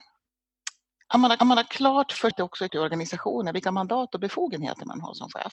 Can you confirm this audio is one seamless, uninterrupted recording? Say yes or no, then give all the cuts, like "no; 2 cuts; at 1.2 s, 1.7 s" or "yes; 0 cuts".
no; 3 cuts; at 1.4 s, 2.3 s, 2.7 s